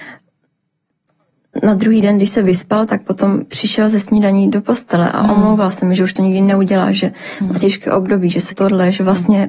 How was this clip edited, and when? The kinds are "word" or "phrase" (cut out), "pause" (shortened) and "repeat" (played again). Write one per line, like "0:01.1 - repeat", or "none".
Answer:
0:08.5 - word